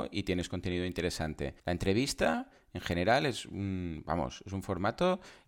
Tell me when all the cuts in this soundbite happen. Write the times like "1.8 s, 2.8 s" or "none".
1.6 s